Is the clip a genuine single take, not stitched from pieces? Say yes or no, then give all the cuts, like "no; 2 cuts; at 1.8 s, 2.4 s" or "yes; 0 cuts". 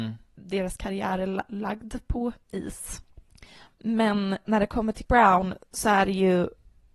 no; 2 cuts; at 4.4 s, 5.1 s